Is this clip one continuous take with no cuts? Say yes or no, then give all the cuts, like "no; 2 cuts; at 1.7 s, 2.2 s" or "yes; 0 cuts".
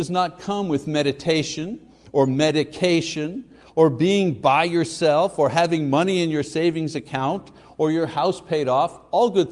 yes; 0 cuts